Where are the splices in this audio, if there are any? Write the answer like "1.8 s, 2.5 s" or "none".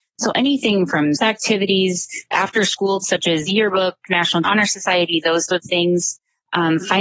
1.1 s, 2.3 s, 3.0 s, 3.5 s, 4.4 s, 5.5 s